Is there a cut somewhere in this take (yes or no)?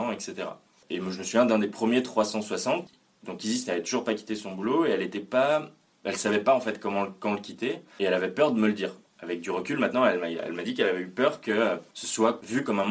no